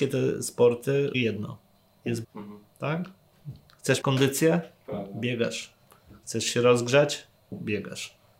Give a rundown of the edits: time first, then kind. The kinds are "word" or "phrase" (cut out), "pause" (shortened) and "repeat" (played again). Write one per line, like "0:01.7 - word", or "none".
0:01.1 - word
0:02.2 - word
0:04.0 - word